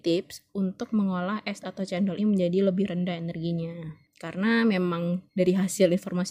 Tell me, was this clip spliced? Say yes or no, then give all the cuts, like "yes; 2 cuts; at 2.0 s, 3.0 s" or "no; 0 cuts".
yes; 2 cuts; at 1.6 s, 2.2 s